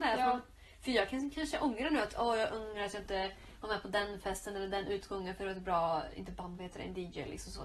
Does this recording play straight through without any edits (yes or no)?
yes